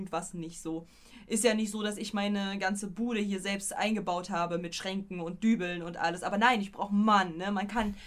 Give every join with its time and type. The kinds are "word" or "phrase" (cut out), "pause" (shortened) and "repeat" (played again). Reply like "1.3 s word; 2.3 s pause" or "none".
none